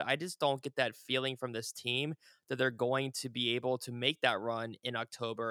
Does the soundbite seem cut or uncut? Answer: uncut